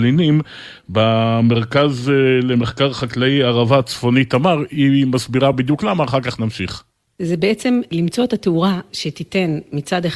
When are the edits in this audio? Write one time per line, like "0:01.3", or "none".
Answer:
none